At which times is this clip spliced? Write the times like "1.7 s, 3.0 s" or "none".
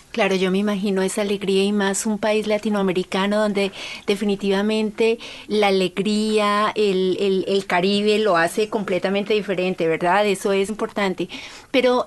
10.7 s

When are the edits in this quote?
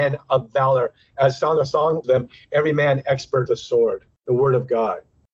2.0 s, 3.5 s

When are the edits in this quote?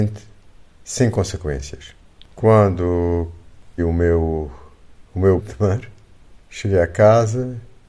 3.8 s, 5.4 s

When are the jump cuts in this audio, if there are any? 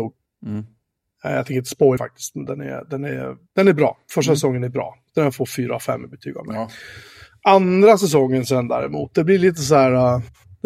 2.0 s

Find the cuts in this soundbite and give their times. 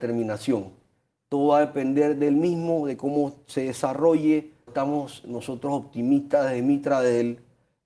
4.7 s

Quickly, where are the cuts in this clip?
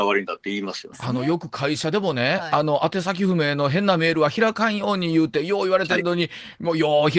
0.9 s

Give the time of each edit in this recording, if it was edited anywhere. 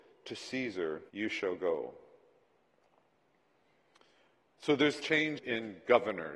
1.1 s, 5.0 s, 5.4 s

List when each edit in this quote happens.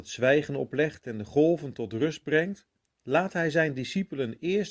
2.8 s

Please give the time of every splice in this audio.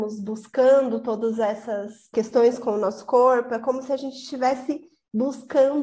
none

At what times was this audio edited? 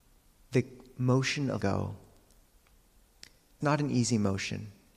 1.6 s, 3.6 s

